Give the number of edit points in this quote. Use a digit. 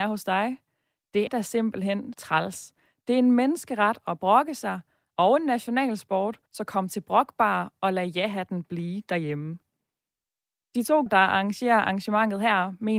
4